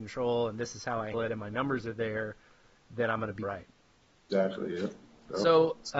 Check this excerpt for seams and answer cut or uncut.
cut